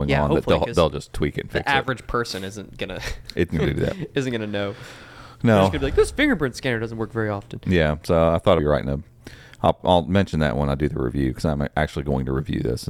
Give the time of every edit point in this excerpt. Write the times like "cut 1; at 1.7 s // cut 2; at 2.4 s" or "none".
cut 1; at 8.6 s